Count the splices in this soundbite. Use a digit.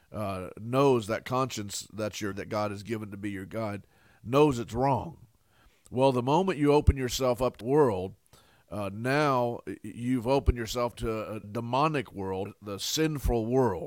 5